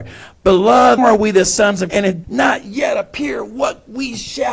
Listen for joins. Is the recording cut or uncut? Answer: cut